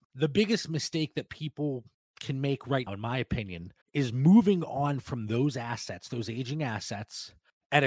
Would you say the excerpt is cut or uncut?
cut